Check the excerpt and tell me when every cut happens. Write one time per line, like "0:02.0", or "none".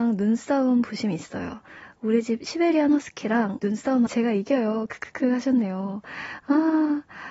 0:03.6
0:04.1